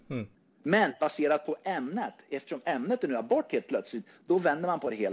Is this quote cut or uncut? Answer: uncut